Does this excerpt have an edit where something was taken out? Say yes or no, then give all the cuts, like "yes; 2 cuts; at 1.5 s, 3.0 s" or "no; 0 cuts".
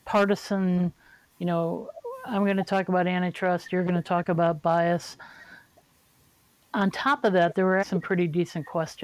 yes; 1 cut; at 7.8 s